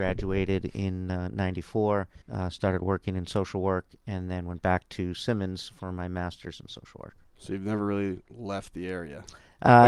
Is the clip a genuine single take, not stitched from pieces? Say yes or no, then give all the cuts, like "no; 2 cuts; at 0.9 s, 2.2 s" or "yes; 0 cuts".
no; 2 cuts; at 2.2 s, 7.3 s